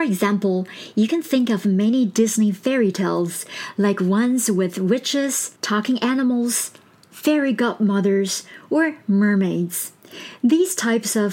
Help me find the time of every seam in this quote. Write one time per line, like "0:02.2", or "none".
0:05.6